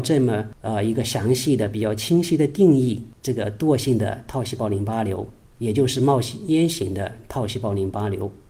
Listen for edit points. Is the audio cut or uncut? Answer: uncut